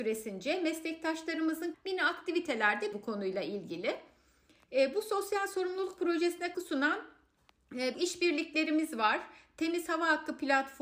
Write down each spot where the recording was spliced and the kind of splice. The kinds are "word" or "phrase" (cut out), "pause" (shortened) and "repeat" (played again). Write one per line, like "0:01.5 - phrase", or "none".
0:01.7 - word
0:02.9 - word
0:06.5 - word
0:07.9 - word

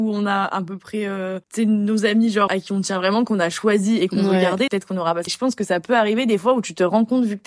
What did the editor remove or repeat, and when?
0:01.4 - pause
0:02.5 - word
0:04.7 - word
0:05.3 - word

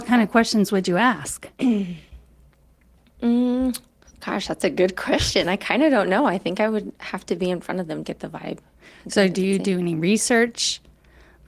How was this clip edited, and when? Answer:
0:04.1 - pause
0:08.0 - phrase

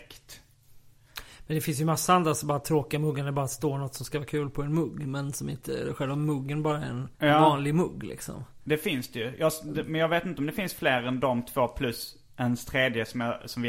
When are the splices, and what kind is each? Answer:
0:07.1 - pause

